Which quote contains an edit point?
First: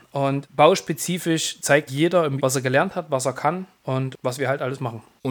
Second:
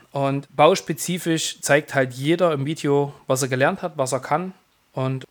first; 3 cuts; at 1.9 s, 2.4 s, 3.8 s

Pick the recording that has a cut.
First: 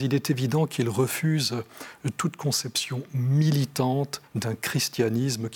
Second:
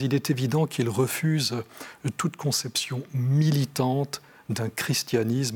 first; 1 cut; at 4.3 s

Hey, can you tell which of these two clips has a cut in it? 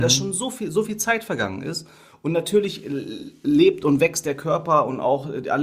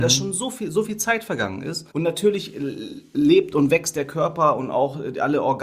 second; 1 cut; at 1.9 s

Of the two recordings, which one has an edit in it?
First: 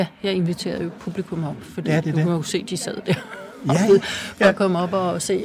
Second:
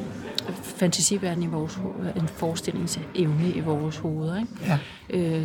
first; 1 cut; at 4.0 s

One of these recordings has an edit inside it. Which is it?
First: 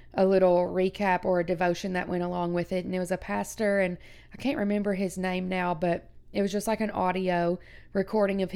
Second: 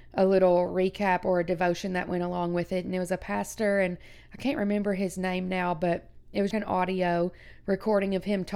second; 1 cut; at 6.5 s

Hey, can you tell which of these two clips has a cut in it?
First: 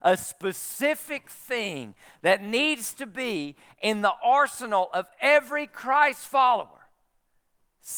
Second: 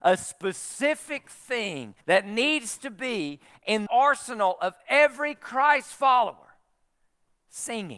second; 2 cuts; at 2.0 s, 3.9 s

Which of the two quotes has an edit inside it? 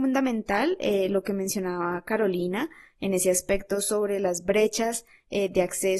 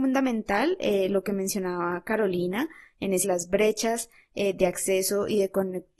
second; 1 cut; at 3.2 s

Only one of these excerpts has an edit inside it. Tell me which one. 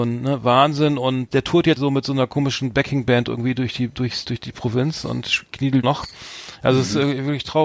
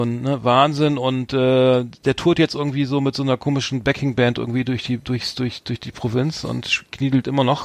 first; 4 cuts; at 1.3 s, 1.8 s, 4.2 s, 5.8 s

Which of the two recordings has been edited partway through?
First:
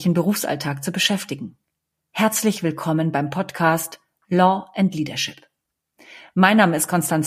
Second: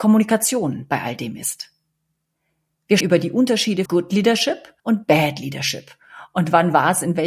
second; 3 cuts; at 3.0 s, 3.9 s, 4.8 s

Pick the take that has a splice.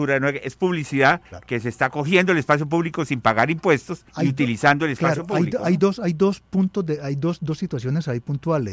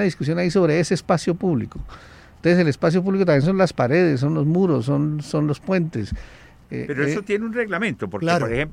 first; 2 cuts; at 1.2 s, 4.1 s

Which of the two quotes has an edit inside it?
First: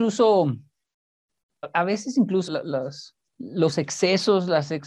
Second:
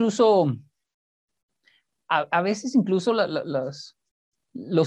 first; 3 cuts; at 1.6 s, 2.5 s, 3.3 s

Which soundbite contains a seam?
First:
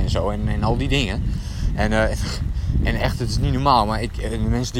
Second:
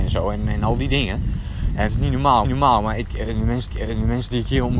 second; 3 cuts; at 1.9 s, 2.4 s, 3.7 s

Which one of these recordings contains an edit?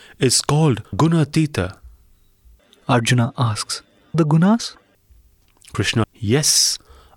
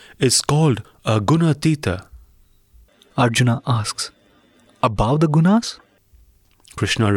first; 3 cuts; at 0.9 s, 4.1 s, 6.0 s

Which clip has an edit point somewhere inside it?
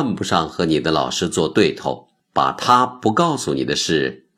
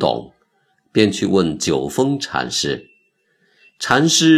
first; 1 cut; at 2.2 s

